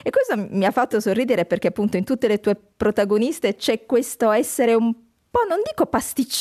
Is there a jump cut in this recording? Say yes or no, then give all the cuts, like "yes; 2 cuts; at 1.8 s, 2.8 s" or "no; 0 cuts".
no; 0 cuts